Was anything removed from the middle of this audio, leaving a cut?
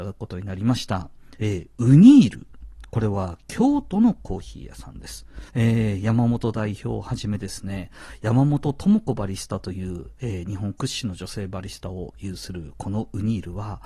yes; 1 cut; at 5.5 s

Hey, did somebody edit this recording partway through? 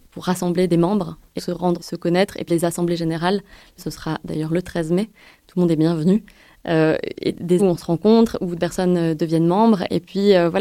yes; 6 cuts; at 1.4 s, 1.8 s, 2.5 s, 3.8 s, 7.6 s, 8.6 s

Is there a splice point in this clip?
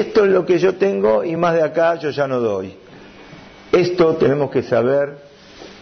no; 0 cuts

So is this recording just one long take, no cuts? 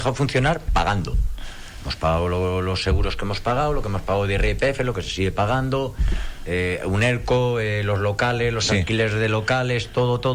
yes; 0 cuts

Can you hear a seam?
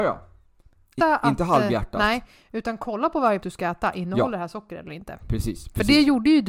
yes; 2 cuts; at 1.0 s, 3.4 s

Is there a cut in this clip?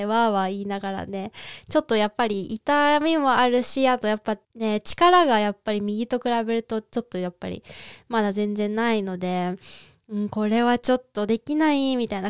yes; 1 cut; at 4.4 s

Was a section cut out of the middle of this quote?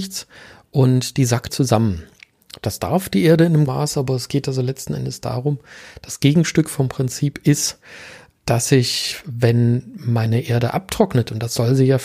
yes; 3 cuts; at 1.5 s, 3.7 s, 8.4 s

